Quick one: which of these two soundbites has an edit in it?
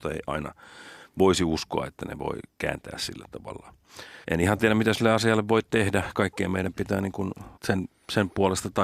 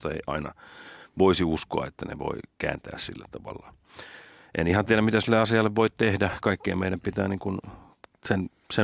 first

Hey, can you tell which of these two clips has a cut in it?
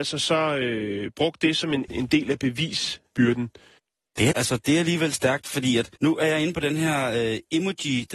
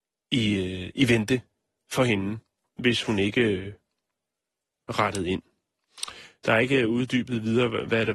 first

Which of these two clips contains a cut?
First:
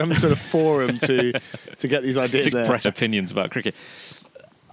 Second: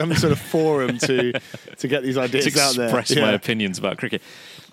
first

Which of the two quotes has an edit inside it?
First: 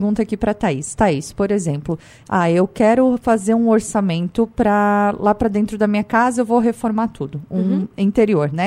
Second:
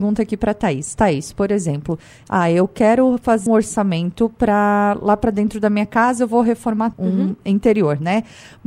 second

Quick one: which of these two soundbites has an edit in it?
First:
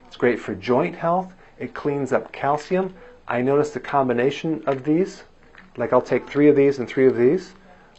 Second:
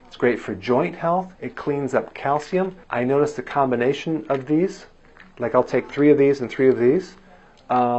second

